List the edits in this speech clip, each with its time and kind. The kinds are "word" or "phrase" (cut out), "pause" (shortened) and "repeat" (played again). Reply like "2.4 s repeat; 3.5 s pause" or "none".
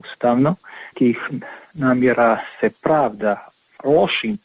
0.9 s word